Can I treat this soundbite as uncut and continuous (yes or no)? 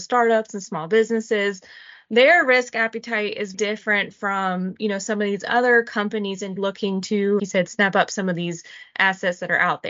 no